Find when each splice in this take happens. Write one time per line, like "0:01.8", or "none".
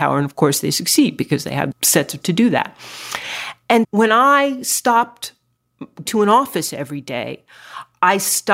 0:01.7
0:02.2
0:03.8
0:06.1